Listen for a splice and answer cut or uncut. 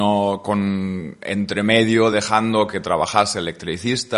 uncut